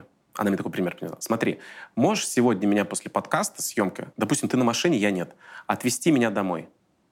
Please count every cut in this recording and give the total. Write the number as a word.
one